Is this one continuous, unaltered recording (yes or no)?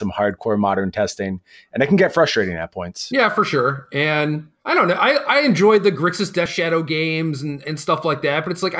yes